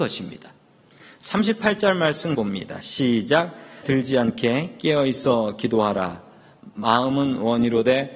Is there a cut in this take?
yes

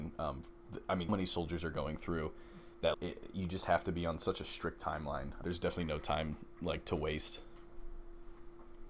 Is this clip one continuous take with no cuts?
no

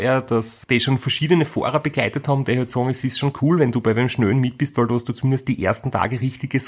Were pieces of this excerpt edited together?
no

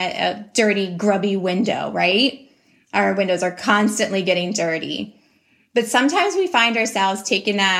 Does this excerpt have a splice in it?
no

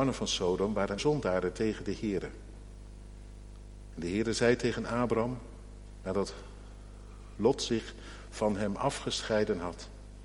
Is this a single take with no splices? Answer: no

